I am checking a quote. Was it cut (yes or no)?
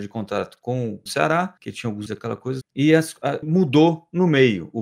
yes